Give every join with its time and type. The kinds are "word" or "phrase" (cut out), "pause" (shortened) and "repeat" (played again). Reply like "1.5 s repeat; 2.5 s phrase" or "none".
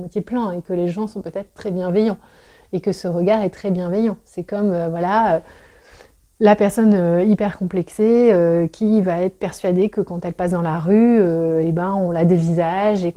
none